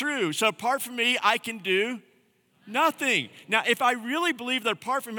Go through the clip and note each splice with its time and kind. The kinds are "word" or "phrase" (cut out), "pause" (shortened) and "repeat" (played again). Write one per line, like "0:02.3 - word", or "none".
none